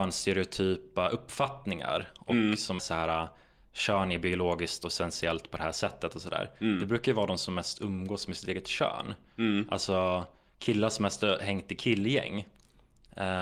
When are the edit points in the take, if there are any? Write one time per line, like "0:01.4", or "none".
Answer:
0:02.8